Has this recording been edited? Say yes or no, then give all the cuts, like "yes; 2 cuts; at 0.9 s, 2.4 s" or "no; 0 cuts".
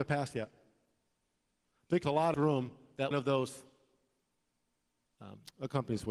yes; 3 cuts; at 2.0 s, 2.3 s, 3.1 s